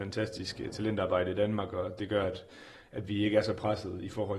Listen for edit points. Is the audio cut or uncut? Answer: uncut